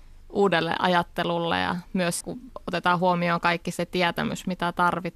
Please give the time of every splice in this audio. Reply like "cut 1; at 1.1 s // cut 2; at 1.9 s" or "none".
cut 1; at 2.2 s

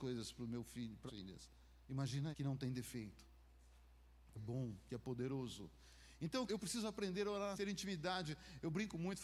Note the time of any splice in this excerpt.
cut 1; at 1.1 s // cut 2; at 2.3 s // cut 3; at 4.4 s // cut 4; at 6.5 s // cut 5; at 7.5 s

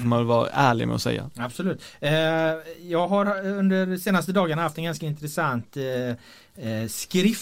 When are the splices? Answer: none

